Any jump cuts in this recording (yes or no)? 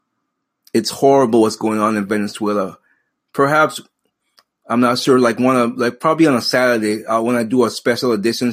no